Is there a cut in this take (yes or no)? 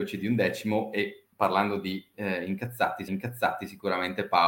yes